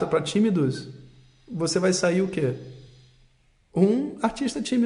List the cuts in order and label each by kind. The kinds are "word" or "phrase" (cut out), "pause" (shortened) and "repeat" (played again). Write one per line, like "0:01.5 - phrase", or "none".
none